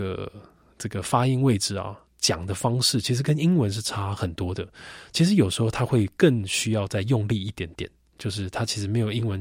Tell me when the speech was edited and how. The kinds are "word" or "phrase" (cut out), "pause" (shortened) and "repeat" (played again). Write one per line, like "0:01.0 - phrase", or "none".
0:02.1 - pause